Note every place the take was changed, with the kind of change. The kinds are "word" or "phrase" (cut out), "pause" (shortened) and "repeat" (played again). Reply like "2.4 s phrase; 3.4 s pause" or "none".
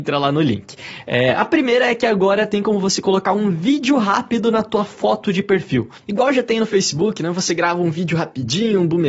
none